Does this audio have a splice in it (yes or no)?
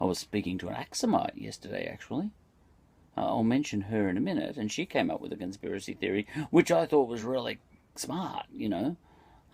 no